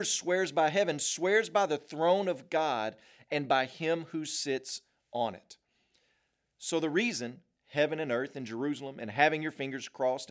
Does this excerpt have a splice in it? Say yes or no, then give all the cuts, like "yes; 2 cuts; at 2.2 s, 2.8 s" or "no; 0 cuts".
no; 0 cuts